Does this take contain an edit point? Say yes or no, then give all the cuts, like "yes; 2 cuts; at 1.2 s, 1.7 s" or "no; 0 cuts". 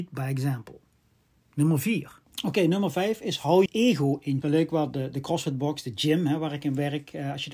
yes; 3 cuts; at 2.3 s, 3.7 s, 4.4 s